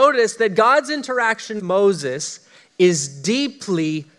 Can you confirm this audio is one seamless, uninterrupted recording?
no; 1 cut; at 1.6 s

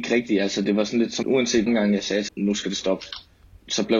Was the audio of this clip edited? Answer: yes; 3 cuts; at 1.2 s, 1.7 s, 2.3 s

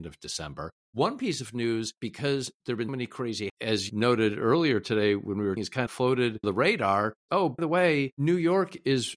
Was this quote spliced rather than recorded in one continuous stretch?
yes; 8 cuts; at 2.0 s, 2.9 s, 3.5 s, 3.9 s, 5.6 s, 5.9 s, 6.4 s, 7.6 s

